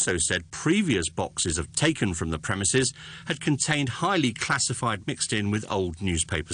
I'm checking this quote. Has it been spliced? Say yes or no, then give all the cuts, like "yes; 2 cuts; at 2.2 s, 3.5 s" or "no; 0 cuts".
yes; 2 cuts; at 1.7 s, 5.0 s